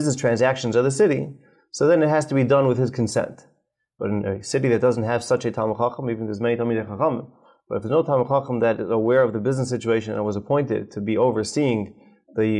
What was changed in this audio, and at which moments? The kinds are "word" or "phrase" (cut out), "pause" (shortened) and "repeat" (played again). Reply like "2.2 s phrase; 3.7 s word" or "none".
none